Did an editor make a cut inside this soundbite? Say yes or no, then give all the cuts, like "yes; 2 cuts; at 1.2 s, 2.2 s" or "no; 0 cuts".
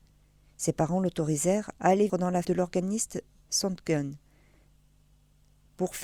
yes; 3 cuts; at 1.8 s, 2.1 s, 2.4 s